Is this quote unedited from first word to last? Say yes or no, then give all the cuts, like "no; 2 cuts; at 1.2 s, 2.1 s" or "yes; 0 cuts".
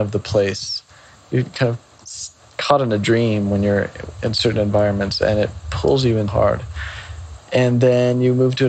no; 1 cut; at 6.3 s